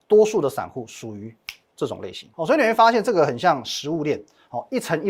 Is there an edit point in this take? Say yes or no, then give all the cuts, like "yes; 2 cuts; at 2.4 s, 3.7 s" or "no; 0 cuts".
yes; 1 cut; at 2.3 s